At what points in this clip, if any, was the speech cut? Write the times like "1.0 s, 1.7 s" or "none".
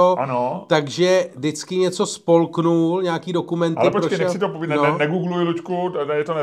none